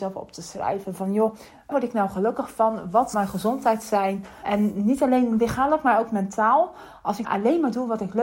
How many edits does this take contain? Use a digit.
3